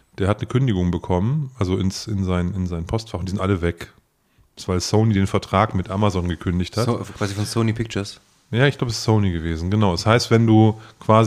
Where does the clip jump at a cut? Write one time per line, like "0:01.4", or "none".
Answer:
none

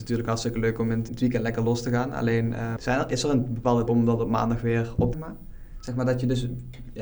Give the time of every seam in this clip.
0:01.1
0:02.8
0:03.9
0:05.1

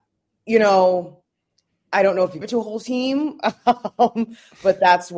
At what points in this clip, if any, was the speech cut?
0:02.4

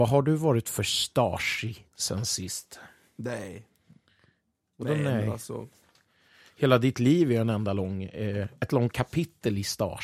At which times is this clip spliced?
none

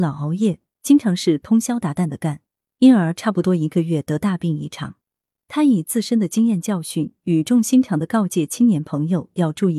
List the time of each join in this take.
none

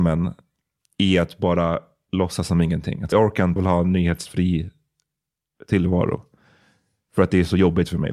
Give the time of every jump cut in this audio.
0:03.1
0:03.6

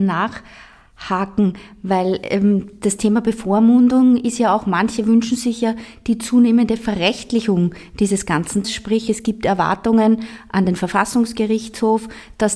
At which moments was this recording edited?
0:08.6

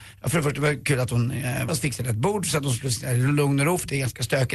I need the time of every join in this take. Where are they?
0:01.7

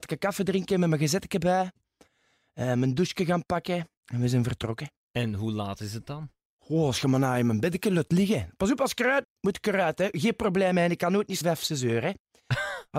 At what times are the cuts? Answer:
0:04.0
0:09.2
0:11.4

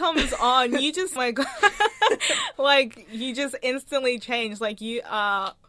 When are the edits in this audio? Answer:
0:01.2

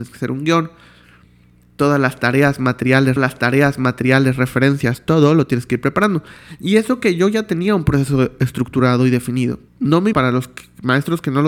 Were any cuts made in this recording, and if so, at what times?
0:03.2
0:09.7
0:10.1

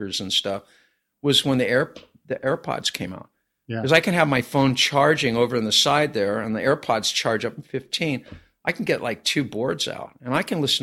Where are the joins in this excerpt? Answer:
none

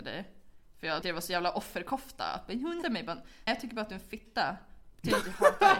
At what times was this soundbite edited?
0:01.0
0:02.8
0:03.5

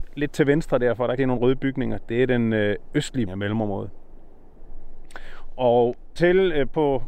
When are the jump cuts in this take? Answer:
0:01.2
0:03.3
0:06.2

